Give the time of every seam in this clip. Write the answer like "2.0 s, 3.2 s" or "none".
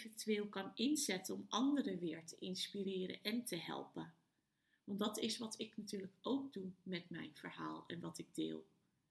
none